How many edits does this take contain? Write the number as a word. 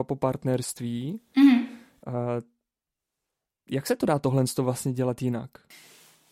zero